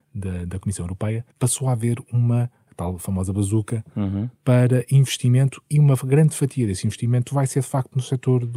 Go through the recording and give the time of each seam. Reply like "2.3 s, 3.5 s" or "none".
1.3 s